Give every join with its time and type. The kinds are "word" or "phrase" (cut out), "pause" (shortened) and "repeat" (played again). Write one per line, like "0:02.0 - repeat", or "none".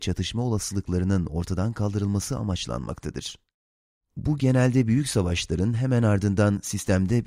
none

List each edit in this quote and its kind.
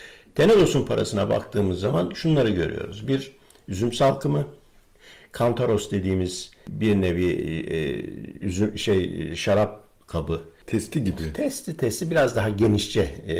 none

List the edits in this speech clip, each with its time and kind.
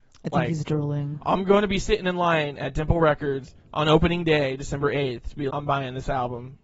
0:05.5 - word

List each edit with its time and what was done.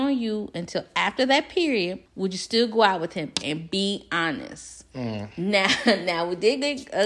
0:02.1 - pause

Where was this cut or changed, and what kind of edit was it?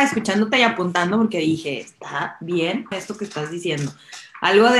0:02.9 - word

